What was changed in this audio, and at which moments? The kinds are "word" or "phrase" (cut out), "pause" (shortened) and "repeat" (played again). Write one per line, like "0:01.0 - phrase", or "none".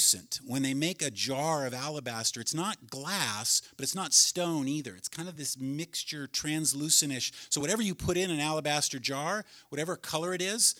none